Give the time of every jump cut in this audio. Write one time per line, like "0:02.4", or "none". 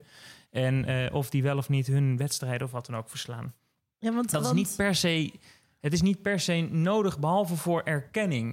none